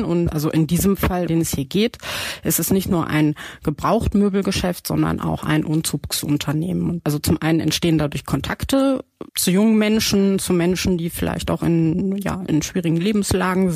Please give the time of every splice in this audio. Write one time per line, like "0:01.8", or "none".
0:01.3
0:09.3